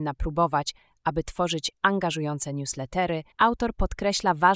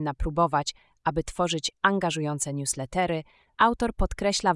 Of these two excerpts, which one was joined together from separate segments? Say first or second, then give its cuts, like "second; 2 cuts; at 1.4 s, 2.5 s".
first; 1 cut; at 3.3 s